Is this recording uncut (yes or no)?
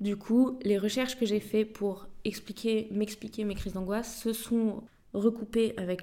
yes